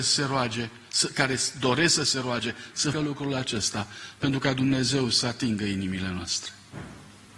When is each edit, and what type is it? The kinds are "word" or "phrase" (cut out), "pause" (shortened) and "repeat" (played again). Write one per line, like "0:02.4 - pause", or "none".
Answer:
0:02.9 - word